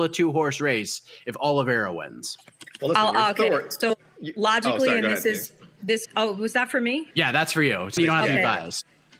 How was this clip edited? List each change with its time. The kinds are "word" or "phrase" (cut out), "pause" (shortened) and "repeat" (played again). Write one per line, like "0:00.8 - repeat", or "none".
0:06.0 - word
0:07.1 - pause
0:08.0 - word